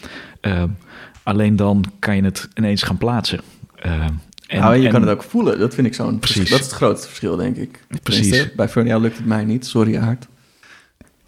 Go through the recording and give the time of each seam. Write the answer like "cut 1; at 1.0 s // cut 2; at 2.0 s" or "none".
none